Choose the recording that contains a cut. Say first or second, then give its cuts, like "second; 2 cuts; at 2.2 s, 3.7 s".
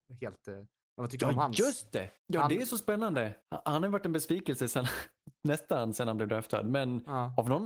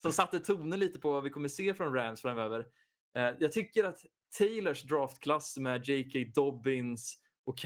first; 2 cuts; at 2.2 s, 3.4 s